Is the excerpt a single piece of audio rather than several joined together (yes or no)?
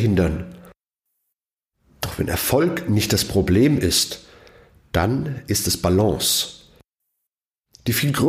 yes